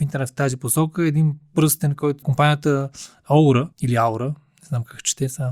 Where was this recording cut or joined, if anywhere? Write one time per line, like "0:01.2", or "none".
0:02.2
0:03.7